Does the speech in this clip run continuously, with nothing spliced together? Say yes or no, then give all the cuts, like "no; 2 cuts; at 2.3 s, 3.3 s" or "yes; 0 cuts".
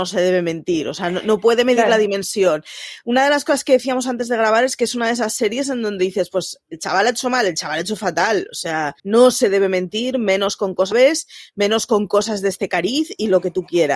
no; 1 cut; at 9.0 s